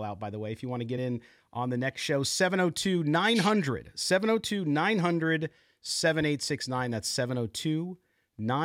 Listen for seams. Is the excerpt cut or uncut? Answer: uncut